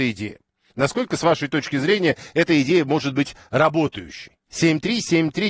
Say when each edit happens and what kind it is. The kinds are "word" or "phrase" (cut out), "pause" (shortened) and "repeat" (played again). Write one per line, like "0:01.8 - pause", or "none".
0:04.4 - pause